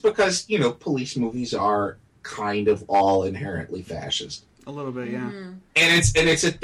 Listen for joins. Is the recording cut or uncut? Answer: cut